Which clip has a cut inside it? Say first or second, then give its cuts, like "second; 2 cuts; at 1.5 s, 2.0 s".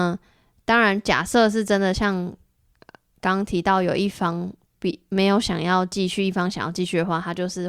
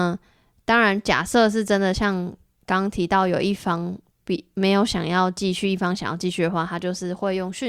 second; 1 cut; at 2.6 s